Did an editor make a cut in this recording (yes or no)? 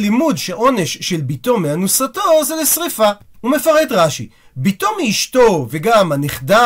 no